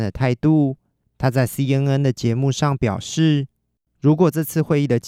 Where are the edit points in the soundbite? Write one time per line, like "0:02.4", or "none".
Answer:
none